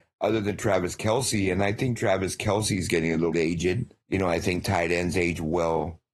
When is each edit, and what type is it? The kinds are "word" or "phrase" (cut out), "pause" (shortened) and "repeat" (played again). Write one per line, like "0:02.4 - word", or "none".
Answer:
0:01.9 - word
0:03.3 - word
0:04.0 - pause